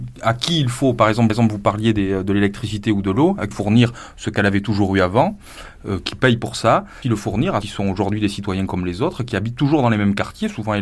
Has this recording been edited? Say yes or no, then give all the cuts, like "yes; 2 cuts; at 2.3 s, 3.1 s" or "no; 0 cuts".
yes; 4 cuts; at 1.3 s, 3.5 s, 7.0 s, 7.6 s